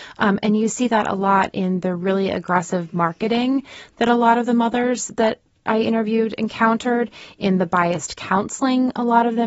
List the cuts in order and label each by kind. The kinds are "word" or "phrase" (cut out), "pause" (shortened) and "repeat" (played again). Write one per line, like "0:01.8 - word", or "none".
none